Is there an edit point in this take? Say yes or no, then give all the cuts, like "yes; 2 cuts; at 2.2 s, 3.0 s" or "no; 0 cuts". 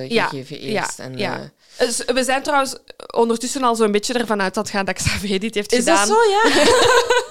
no; 0 cuts